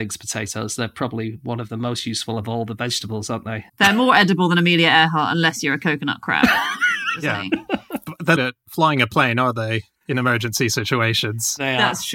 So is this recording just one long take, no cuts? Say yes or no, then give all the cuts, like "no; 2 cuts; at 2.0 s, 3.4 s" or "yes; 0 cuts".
no; 2 cuts; at 3.7 s, 8.4 s